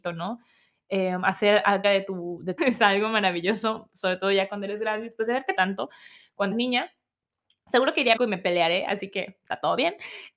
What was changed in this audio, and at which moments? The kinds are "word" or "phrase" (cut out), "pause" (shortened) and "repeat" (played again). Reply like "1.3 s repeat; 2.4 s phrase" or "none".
1.8 s word; 2.6 s word; 5.6 s word; 6.5 s word; 8.2 s word